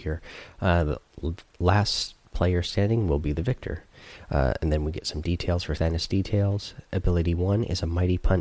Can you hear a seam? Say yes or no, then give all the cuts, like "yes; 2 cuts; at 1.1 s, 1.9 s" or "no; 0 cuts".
yes; 1 cut; at 5.8 s